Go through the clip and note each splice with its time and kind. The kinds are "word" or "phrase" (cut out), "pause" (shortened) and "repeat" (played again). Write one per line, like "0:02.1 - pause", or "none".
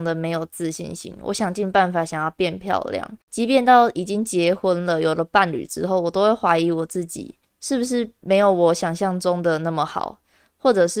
0:03.2 - pause